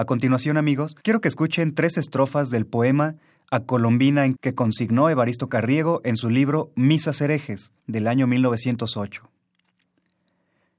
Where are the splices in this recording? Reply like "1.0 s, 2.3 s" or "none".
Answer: 1.0 s, 4.4 s, 7.8 s